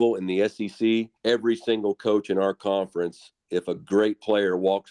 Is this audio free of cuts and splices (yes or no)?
no